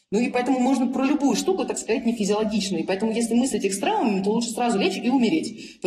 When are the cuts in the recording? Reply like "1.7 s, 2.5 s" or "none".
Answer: none